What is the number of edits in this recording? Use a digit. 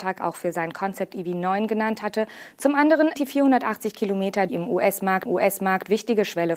3